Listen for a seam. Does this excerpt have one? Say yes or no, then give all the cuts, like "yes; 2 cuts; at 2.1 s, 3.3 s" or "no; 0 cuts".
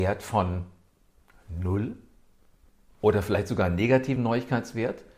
no; 0 cuts